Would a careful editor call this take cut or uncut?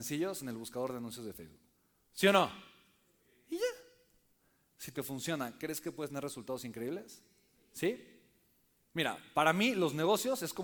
cut